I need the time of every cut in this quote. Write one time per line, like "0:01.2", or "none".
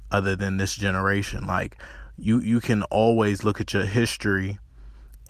none